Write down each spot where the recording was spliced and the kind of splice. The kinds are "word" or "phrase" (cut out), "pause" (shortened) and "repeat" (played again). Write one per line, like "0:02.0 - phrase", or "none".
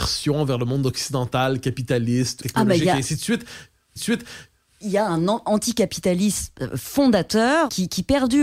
0:02.4 - word
0:04.0 - repeat